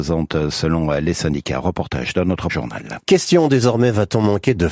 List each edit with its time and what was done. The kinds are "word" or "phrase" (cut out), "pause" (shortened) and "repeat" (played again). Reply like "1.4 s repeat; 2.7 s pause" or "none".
2.5 s word